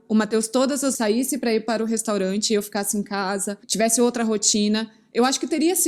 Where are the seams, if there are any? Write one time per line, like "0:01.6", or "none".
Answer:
0:00.9
0:03.6